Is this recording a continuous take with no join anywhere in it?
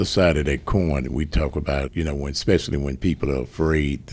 no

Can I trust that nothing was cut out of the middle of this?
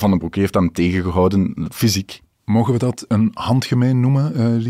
yes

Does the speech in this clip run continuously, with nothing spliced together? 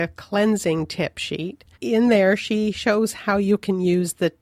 no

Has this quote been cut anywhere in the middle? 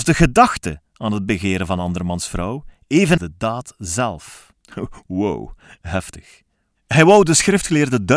yes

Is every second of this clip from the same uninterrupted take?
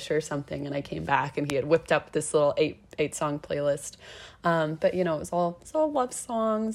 yes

